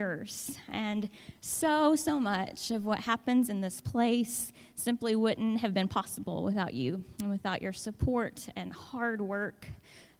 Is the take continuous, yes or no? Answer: yes